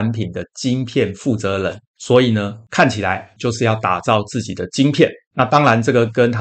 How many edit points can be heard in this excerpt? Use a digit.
1